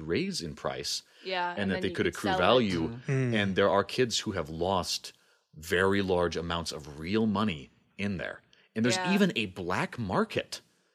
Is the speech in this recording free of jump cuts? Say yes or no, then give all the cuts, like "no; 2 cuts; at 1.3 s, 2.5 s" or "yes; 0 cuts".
yes; 0 cuts